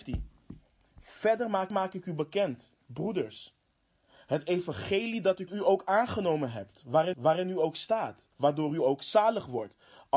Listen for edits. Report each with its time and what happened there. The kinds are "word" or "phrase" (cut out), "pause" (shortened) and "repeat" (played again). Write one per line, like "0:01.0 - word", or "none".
0:01.7 - repeat
0:05.5 - phrase
0:07.1 - repeat
0:08.3 - pause